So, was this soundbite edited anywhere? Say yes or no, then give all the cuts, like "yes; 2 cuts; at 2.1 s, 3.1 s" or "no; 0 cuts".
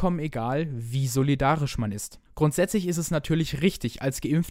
yes; 1 cut; at 2.3 s